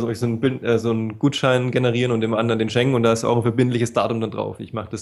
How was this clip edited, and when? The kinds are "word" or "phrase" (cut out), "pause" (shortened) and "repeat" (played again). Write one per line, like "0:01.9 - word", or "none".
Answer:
none